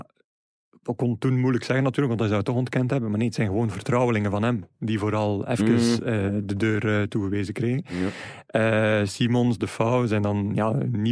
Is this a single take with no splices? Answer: yes; 0 cuts

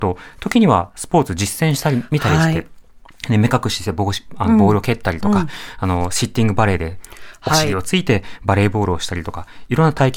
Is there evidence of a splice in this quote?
no; 0 cuts

